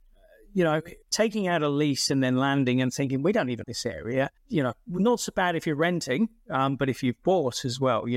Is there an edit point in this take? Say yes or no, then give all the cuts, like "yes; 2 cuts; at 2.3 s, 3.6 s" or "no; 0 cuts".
yes; 3 cuts; at 1.0 s, 3.6 s, 4.4 s